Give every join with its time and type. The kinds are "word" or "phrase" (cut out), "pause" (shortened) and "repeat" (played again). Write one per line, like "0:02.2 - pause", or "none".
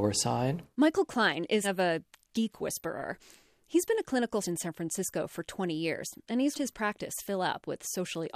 0:01.6 - word
0:04.4 - word
0:06.5 - word